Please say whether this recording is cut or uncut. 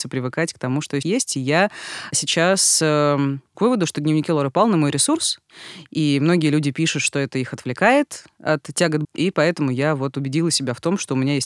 cut